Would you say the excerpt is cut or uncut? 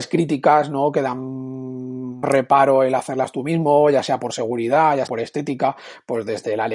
cut